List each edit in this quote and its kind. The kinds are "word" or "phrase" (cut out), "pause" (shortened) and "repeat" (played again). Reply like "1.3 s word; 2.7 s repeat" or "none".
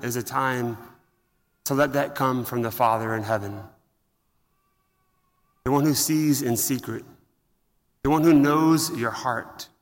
none